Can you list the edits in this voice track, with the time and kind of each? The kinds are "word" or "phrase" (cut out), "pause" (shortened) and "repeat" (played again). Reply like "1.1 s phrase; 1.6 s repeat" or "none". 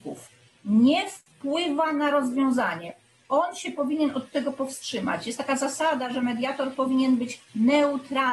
none